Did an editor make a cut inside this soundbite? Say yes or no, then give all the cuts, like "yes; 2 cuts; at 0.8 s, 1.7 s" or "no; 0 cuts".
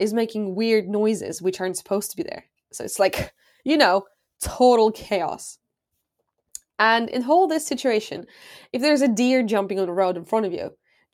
no; 0 cuts